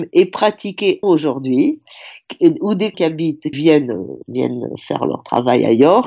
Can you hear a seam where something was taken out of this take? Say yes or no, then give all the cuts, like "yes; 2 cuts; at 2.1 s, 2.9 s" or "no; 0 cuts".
yes; 4 cuts; at 1.0 s, 2.9 s, 3.5 s, 4.2 s